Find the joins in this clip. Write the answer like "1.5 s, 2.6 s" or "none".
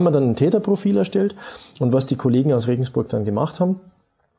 none